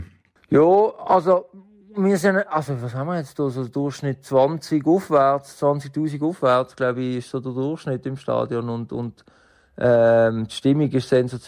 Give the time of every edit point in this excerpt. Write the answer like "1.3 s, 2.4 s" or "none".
none